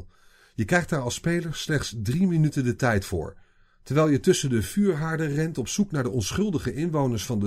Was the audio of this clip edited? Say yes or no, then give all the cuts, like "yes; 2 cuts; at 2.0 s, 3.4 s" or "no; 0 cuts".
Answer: no; 0 cuts